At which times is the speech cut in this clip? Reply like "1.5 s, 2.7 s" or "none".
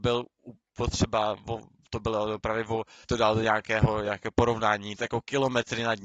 3.0 s, 5.0 s